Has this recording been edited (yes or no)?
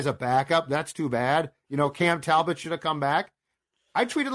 no